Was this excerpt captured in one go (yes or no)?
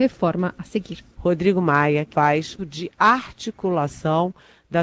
no